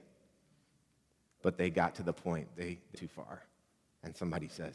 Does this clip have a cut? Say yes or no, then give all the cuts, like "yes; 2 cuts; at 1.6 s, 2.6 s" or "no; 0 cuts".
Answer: yes; 1 cut; at 2.9 s